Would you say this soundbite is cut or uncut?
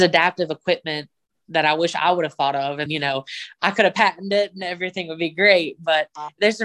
cut